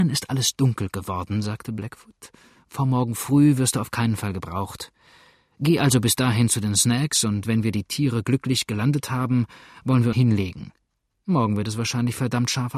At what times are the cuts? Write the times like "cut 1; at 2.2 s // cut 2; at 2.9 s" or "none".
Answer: cut 1; at 10.1 s